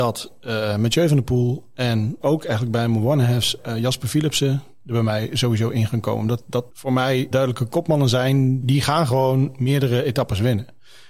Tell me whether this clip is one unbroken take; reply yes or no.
no